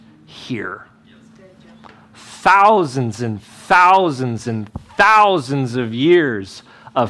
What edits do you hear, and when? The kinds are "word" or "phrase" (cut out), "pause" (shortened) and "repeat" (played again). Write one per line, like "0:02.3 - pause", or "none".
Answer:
none